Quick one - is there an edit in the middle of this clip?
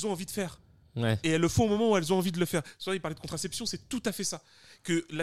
no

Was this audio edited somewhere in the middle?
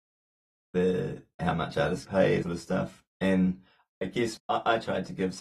yes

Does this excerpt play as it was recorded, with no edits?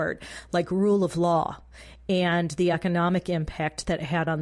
yes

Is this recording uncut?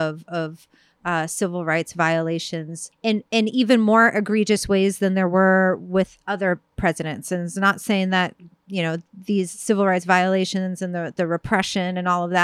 no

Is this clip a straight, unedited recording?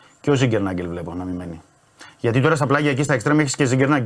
yes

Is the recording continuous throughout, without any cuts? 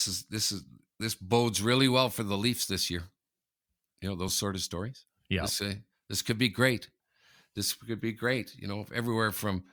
yes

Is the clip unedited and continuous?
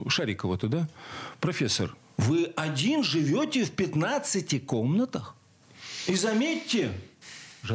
yes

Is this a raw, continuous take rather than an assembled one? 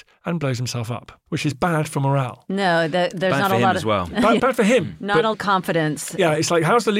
no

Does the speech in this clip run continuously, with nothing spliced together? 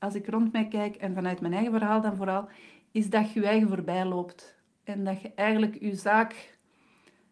yes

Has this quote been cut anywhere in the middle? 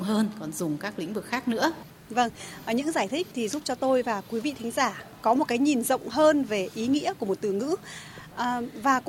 no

